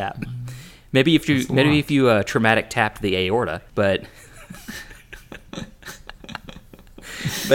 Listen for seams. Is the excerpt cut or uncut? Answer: cut